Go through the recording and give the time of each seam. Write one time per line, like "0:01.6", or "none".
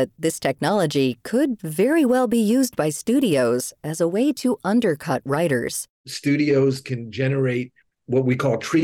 none